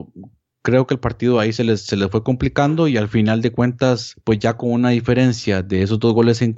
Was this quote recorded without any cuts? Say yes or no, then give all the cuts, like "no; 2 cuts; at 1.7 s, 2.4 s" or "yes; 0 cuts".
no; 1 cut; at 4.2 s